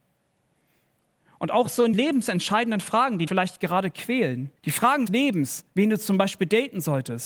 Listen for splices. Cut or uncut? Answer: cut